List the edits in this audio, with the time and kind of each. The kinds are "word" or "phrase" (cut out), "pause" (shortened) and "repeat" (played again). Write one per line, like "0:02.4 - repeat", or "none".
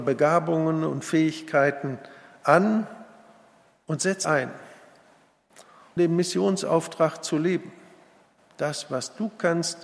0:04.2 - word
0:06.0 - word